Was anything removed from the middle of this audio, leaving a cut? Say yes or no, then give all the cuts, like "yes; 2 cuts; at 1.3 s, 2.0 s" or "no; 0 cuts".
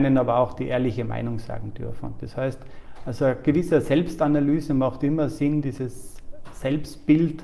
no; 0 cuts